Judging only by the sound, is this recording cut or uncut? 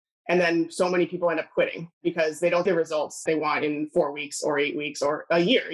cut